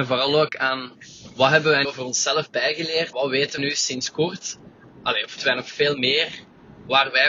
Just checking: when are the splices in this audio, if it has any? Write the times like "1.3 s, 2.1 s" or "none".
1.8 s, 3.1 s, 3.6 s, 5.4 s